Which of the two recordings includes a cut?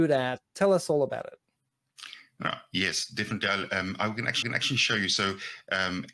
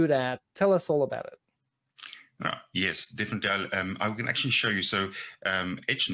first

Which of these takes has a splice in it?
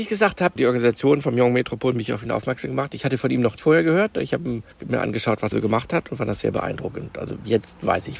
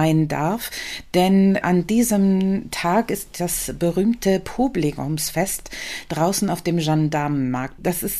first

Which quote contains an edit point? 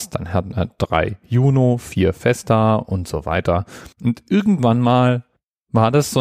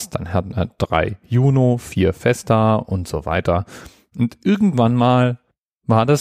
first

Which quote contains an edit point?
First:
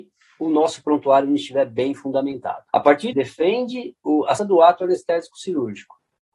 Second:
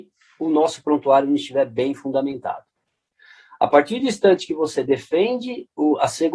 first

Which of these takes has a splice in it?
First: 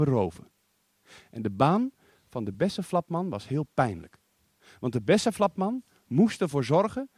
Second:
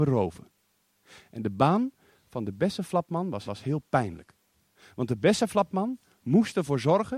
second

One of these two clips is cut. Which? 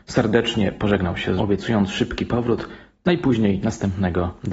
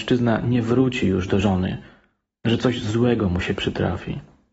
first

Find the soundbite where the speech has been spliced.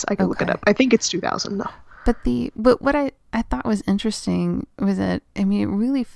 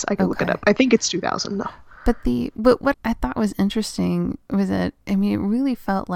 second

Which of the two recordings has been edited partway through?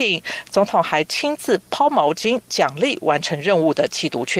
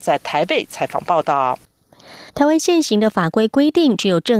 second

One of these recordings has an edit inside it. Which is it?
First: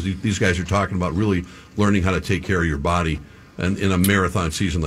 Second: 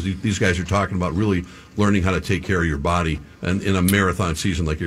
second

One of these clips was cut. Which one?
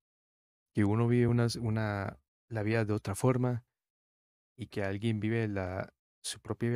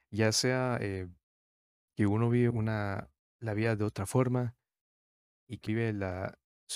second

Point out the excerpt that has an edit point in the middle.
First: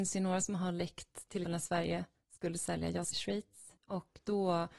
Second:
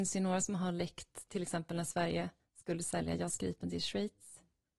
first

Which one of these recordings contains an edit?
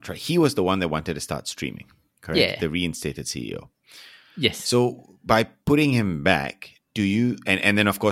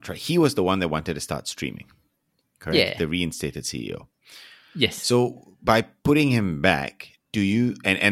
first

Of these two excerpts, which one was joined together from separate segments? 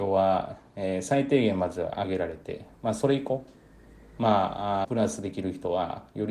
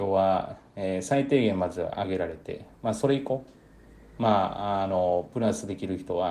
first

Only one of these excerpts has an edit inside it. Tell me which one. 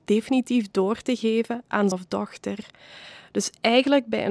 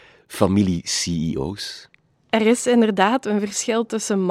first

